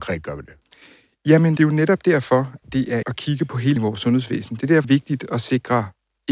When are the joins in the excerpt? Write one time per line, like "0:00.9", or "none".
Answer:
0:01.6
0:02.6
0:03.0
0:03.8
0:04.8